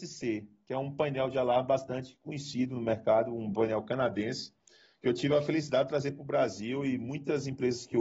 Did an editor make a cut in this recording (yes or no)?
no